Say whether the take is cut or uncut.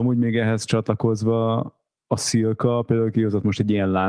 uncut